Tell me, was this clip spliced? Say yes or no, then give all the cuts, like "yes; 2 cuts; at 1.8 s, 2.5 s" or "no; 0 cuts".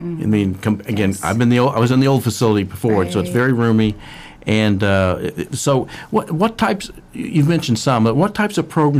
no; 0 cuts